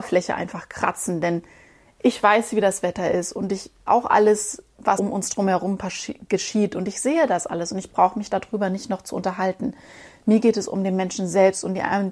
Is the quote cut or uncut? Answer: cut